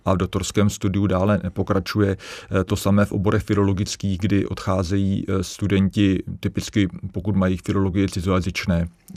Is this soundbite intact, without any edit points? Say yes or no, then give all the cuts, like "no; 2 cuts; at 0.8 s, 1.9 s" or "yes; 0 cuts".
yes; 0 cuts